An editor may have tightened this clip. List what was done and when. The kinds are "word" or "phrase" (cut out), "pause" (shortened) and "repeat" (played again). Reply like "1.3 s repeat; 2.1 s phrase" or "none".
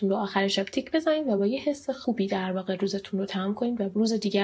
none

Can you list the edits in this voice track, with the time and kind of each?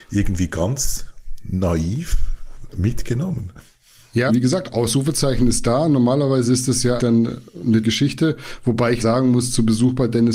4.3 s word; 7.0 s word; 7.8 s word; 9.0 s word

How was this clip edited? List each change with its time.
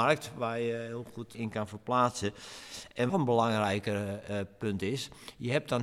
1.3 s word; 3.1 s phrase

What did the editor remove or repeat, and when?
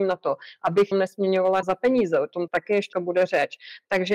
0.9 s word; 1.6 s word; 2.5 s word; 2.9 s word

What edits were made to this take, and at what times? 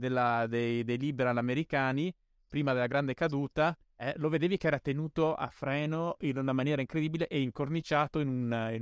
none

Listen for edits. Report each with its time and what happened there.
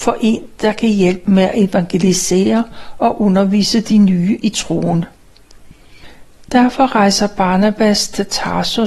none

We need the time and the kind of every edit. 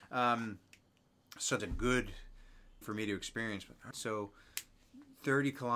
1.6 s phrase; 2.8 s word; 3.9 s word

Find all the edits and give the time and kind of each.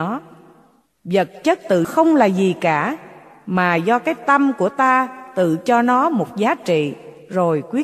1.8 s word

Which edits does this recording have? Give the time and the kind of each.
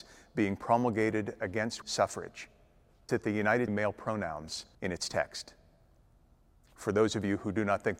1.8 s word; 3.1 s word; 3.7 s phrase; 4.7 s pause

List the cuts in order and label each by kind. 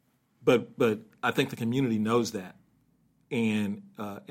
none

